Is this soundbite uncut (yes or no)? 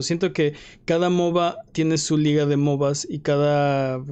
yes